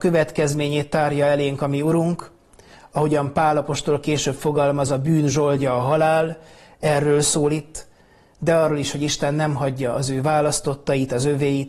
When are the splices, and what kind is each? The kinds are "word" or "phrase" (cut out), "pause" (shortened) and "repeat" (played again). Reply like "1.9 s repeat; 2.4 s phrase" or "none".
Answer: none